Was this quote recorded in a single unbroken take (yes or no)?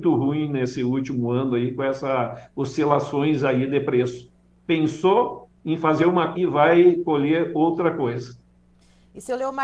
no